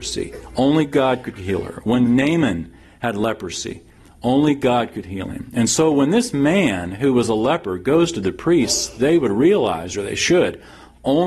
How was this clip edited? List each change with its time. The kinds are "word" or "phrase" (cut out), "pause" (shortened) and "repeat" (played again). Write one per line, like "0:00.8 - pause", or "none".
none